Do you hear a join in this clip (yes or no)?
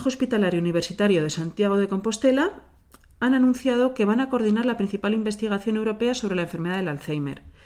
no